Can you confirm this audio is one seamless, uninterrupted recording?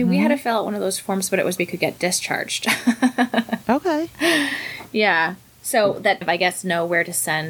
no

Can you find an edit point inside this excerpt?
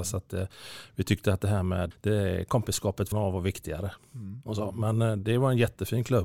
yes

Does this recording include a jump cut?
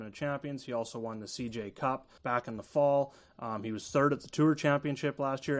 yes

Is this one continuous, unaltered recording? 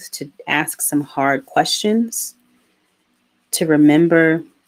yes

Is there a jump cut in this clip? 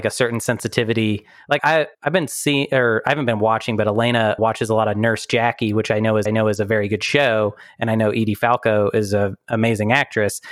yes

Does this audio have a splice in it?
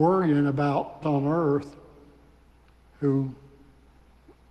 yes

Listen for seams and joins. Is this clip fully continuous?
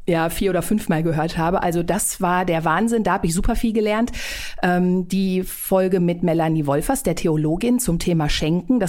yes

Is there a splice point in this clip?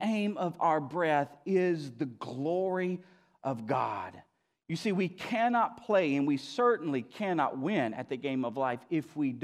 no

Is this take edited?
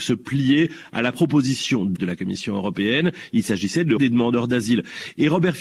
yes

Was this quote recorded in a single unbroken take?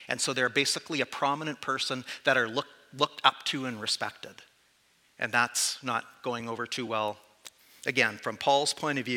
yes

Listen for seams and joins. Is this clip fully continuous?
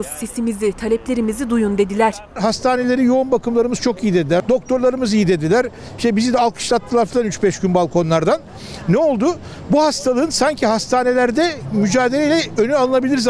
yes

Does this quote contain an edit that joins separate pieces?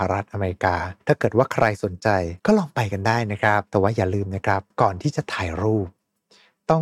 yes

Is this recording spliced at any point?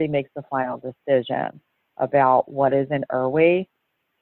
no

